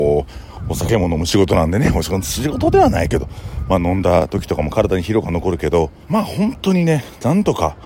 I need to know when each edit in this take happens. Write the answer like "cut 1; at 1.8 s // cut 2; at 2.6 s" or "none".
cut 1; at 6.0 s